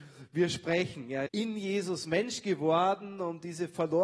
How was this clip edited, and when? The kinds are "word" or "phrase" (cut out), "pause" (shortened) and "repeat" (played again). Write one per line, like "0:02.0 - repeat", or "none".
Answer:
0:01.3 - word